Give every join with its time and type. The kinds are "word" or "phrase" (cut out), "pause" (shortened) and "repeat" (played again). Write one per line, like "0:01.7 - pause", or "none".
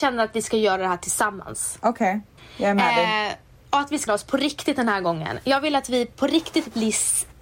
0:02.4 - pause
0:04.1 - word